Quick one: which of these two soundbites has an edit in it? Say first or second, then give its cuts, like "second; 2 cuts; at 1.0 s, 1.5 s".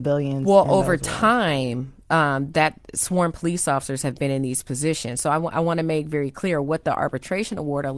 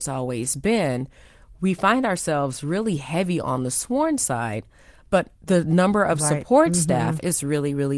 second; 1 cut; at 5.4 s